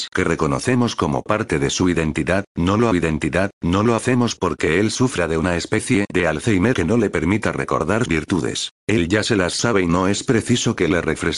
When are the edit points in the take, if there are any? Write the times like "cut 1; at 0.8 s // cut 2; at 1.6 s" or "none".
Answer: cut 1; at 2.9 s // cut 2; at 6.7 s // cut 3; at 8.1 s // cut 4; at 8.8 s